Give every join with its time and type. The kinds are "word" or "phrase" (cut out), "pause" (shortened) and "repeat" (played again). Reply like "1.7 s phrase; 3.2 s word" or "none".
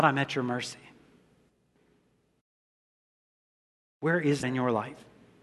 4.4 s word